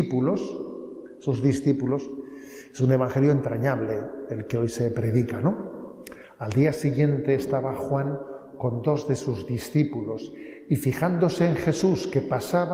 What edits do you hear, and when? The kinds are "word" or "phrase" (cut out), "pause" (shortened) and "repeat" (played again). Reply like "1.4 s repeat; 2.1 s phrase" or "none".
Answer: none